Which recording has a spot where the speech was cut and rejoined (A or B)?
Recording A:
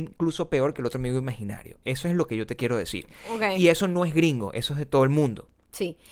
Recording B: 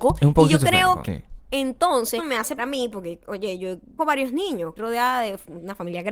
B